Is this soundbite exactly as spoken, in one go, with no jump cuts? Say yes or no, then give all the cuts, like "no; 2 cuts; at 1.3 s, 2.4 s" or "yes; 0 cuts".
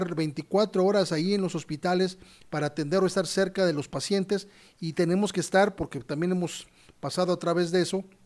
yes; 0 cuts